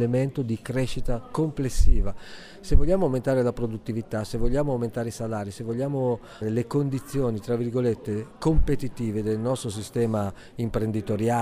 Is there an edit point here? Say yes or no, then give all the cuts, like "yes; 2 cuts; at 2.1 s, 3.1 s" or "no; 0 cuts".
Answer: yes; 1 cut; at 6.4 s